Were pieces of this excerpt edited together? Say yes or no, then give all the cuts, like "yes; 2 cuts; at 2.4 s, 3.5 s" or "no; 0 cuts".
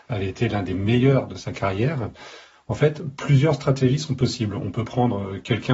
no; 0 cuts